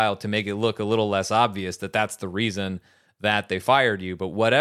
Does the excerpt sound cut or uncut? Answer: uncut